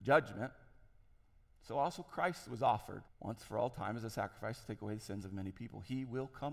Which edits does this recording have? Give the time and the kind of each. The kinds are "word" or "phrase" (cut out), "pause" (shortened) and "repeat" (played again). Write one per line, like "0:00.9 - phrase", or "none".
0:03.1 - pause